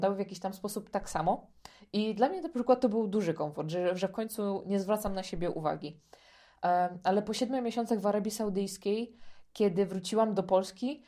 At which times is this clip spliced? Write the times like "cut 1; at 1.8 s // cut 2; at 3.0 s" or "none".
none